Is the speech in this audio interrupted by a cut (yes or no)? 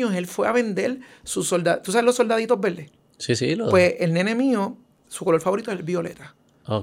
no